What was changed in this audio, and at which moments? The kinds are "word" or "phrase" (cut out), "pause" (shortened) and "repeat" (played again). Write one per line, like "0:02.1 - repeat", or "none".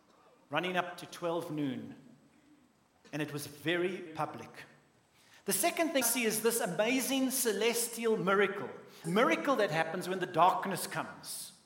0:04.1 - word
0:06.0 - word
0:09.0 - word